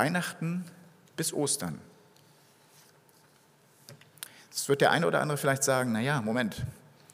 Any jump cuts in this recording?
no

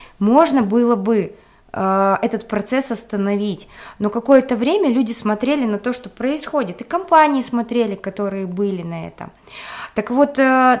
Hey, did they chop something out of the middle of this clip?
no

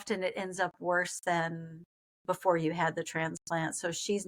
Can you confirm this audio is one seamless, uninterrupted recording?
yes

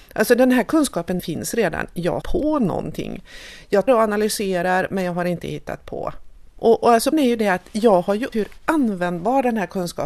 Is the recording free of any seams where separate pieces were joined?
no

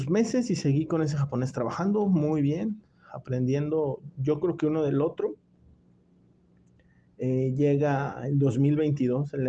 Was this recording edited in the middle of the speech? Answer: no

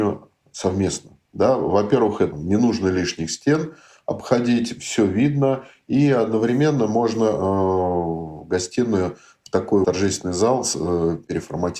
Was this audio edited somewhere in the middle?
yes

